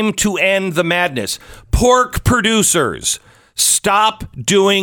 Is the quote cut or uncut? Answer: uncut